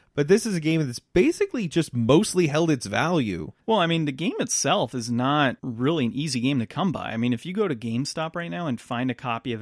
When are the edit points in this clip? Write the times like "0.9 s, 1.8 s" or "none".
3.6 s, 5.6 s